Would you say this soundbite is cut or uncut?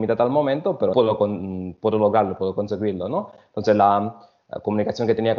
cut